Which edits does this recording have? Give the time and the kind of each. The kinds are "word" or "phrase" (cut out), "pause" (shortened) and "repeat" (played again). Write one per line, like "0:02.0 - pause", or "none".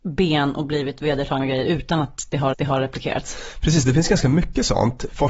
0:02.5 - repeat